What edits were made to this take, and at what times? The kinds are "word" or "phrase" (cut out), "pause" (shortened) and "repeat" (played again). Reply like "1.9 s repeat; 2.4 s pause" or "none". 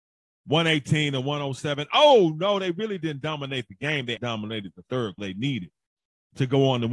4.2 s word; 5.2 s phrase